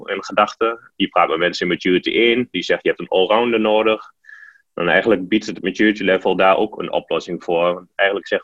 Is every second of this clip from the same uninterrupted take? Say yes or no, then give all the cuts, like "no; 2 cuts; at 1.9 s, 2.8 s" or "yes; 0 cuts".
yes; 0 cuts